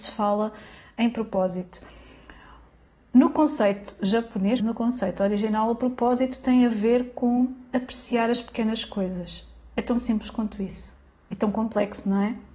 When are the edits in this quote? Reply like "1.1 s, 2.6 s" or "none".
4.6 s